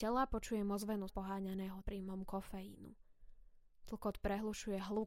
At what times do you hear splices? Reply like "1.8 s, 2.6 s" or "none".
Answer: 1.1 s, 1.8 s